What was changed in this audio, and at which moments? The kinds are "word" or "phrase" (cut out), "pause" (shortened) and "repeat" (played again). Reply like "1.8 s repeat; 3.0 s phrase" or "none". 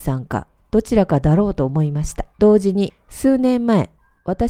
2.3 s pause